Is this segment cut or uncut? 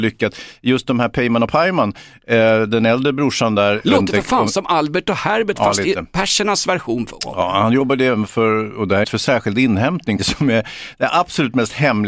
cut